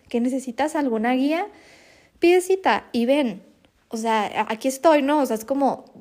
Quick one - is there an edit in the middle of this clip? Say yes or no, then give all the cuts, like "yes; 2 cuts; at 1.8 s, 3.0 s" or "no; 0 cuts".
yes; 1 cut; at 3.7 s